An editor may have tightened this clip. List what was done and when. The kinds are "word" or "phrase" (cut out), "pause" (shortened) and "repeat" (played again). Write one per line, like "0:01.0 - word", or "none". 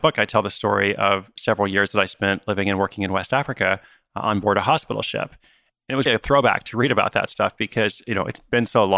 0:06.1 - word